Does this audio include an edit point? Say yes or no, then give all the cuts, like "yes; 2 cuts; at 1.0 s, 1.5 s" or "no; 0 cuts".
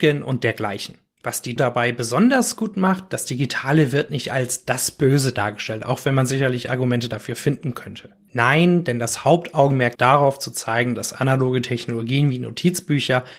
yes; 2 cuts; at 1.6 s, 9.9 s